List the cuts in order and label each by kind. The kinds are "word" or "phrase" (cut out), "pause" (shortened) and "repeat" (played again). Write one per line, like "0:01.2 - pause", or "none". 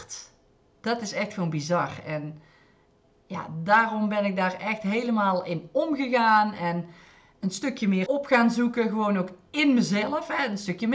0:08.1 - phrase

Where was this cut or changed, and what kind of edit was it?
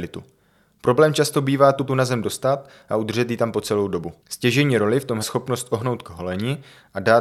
0:01.9 - word
0:04.2 - pause
0:05.2 - word
0:06.0 - word

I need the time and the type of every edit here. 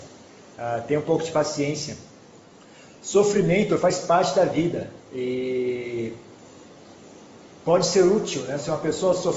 none

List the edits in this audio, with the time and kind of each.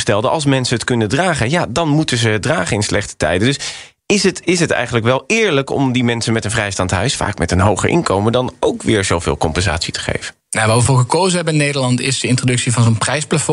0:10.4 - pause

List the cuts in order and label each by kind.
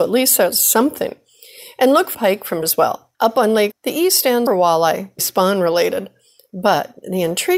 0:02.1 - word
0:02.6 - word
0:03.1 - pause
0:03.7 - word
0:04.5 - phrase
0:05.2 - word

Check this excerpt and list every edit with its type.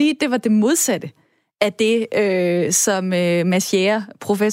none

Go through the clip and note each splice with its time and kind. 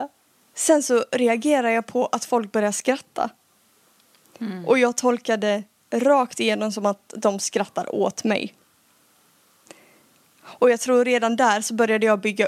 none

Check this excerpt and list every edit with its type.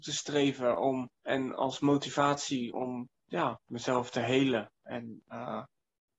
0:01.1 - pause
0:02.7 - word

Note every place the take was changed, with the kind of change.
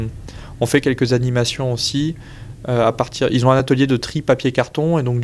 none

